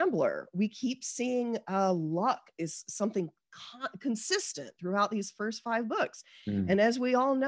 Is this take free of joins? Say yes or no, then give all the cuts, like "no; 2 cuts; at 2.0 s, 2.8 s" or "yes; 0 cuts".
yes; 0 cuts